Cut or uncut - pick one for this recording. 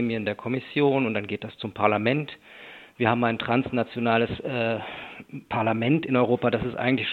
uncut